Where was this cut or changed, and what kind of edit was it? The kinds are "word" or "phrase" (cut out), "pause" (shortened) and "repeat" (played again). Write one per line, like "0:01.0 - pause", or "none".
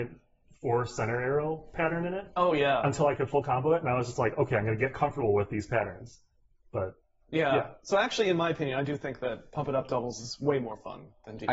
none